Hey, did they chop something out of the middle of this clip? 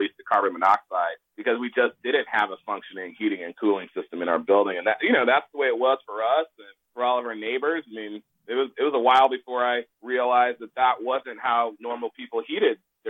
yes; 3 cuts; at 1.3 s, 6.8 s, 9.9 s

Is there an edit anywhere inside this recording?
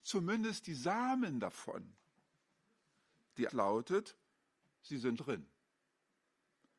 yes; 2 cuts; at 3.5 s, 5.2 s

